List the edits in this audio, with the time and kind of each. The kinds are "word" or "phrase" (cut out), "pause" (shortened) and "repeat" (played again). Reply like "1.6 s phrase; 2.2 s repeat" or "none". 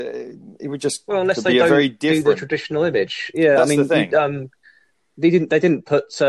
none